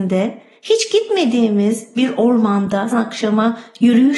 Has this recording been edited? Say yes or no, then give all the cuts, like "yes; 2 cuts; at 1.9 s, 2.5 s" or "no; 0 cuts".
yes; 1 cut; at 2.9 s